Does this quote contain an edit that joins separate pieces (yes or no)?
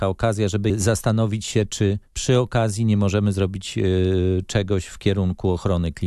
yes